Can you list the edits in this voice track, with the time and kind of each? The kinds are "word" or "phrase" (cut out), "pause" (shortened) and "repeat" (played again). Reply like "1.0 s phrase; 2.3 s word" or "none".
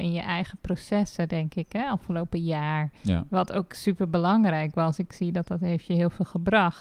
3.0 s pause